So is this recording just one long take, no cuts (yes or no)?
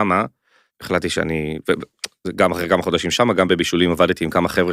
yes